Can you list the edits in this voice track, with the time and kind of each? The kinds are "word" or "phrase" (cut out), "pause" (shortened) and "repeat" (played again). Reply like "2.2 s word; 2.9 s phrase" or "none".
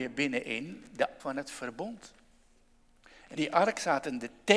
1.2 s word; 3.4 s word